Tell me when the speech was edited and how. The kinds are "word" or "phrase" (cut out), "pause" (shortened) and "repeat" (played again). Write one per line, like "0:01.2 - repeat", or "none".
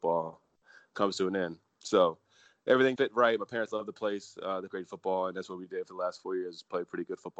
0:03.0 - word
0:04.7 - word